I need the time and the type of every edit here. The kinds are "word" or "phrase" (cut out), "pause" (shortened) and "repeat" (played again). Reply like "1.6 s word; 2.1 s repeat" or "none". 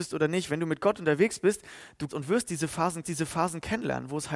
2.1 s word; 3.0 s repeat